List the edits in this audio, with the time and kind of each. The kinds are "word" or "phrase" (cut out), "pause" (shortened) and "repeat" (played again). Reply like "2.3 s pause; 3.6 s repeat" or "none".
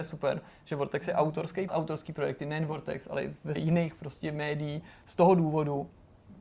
1.7 s phrase; 3.6 s word